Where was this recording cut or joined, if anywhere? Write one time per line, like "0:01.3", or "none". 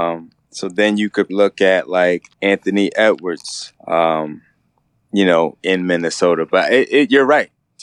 0:01.3
0:02.3
0:03.8